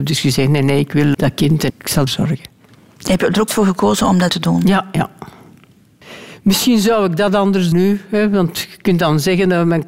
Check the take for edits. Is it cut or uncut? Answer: cut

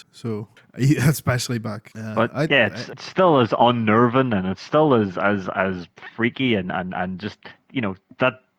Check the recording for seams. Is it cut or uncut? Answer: uncut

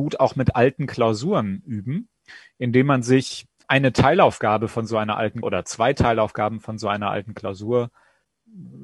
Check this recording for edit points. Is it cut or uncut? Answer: cut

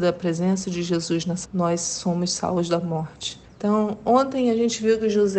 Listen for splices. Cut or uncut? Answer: cut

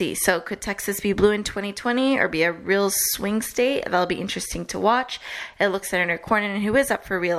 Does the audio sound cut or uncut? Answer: cut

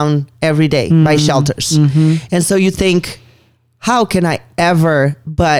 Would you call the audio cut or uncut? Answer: uncut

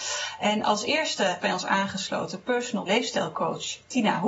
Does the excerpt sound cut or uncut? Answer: cut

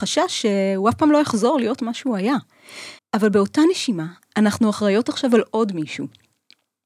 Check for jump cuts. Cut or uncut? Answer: cut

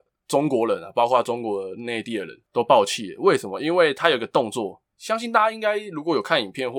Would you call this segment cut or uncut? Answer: cut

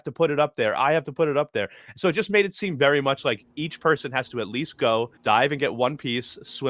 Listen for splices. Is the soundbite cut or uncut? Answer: cut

